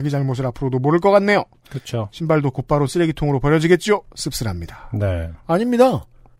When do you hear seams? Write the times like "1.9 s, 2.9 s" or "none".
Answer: none